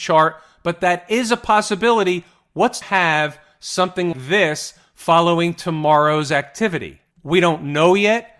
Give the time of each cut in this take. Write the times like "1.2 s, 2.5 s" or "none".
2.8 s, 4.1 s